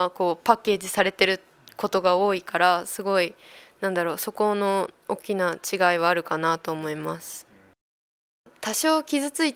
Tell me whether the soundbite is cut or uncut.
uncut